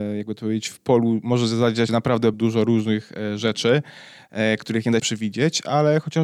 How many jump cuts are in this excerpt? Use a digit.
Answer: 3